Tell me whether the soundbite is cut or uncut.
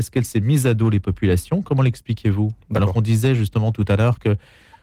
uncut